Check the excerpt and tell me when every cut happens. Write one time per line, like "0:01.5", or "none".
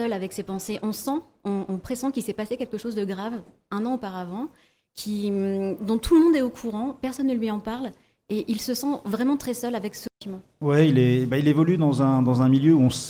none